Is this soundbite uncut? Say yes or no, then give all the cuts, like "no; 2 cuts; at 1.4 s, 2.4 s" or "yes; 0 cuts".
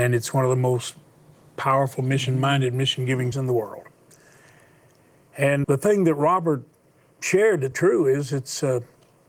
no; 3 cuts; at 3.3 s, 5.6 s, 7.7 s